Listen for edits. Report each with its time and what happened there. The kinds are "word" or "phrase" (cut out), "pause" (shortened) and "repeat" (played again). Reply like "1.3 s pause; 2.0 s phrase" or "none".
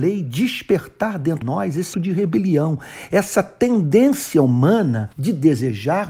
1.4 s word; 1.9 s word; 5.1 s pause